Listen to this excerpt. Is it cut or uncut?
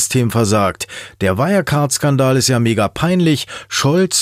uncut